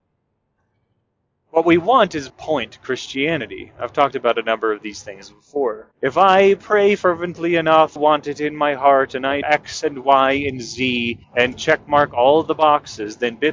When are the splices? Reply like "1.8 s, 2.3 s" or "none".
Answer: 2.3 s, 5.9 s, 8.0 s, 9.4 s, 11.2 s